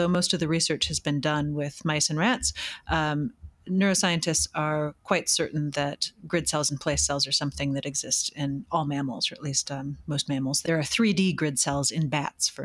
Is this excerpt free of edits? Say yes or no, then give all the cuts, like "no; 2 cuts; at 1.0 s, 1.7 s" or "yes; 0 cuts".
yes; 0 cuts